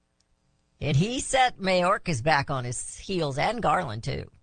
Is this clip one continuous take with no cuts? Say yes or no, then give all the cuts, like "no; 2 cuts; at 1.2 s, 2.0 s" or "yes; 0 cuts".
yes; 0 cuts